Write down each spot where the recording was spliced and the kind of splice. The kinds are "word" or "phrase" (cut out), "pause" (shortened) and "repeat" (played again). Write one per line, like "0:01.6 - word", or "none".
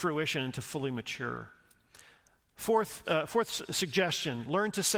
0:03.0 - word